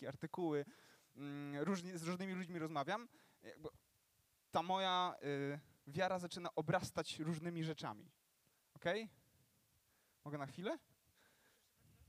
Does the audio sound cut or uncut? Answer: uncut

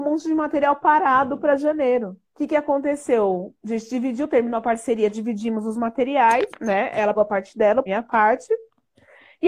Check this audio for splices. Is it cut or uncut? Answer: cut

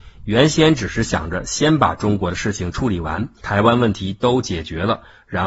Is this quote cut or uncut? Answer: cut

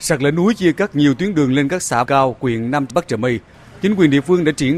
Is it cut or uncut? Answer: cut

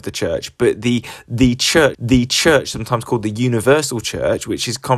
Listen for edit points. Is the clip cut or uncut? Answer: cut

